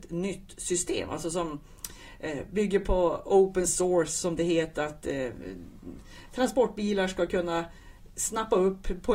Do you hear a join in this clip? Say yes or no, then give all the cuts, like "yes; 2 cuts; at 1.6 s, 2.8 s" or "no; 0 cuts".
no; 0 cuts